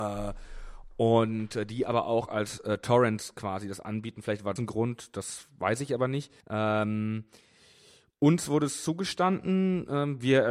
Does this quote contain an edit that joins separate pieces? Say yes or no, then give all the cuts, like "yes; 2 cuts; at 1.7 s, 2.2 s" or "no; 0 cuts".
yes; 2 cuts; at 4.6 s, 6.4 s